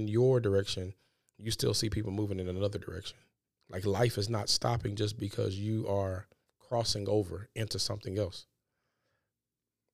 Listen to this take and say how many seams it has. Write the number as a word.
one